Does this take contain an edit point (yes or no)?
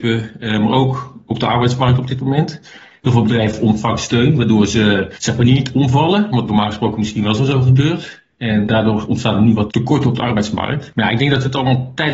no